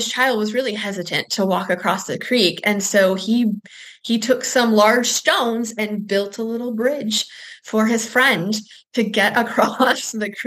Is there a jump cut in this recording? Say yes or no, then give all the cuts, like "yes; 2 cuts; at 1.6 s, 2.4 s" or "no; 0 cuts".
no; 0 cuts